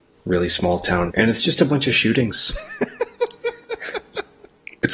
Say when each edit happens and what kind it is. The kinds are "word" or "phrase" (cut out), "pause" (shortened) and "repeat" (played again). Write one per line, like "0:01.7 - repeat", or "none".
0:01.1 - word